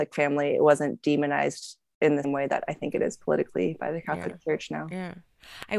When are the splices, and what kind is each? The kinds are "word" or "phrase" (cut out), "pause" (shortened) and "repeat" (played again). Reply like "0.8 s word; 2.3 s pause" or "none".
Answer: 2.2 s word